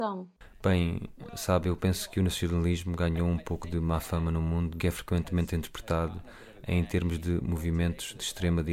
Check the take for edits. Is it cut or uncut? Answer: cut